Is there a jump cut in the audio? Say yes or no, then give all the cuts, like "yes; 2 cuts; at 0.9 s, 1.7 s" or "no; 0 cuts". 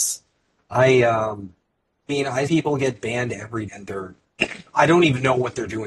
yes; 3 cuts; at 2.1 s, 2.5 s, 3.7 s